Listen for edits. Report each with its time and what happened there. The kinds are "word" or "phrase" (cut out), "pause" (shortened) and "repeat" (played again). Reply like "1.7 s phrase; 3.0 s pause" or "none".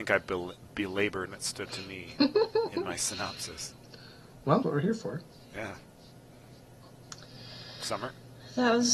1.3 s word; 1.7 s word; 4.6 s word